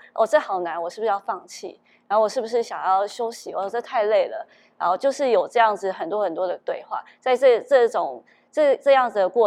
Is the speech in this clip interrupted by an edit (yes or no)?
no